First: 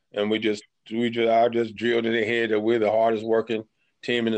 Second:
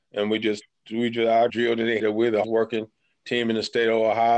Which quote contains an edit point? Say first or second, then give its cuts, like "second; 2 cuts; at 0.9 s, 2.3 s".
second; 3 cuts; at 1.5 s, 2.0 s, 2.4 s